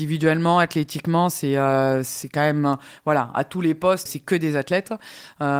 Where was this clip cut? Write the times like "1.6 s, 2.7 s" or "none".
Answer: 4.1 s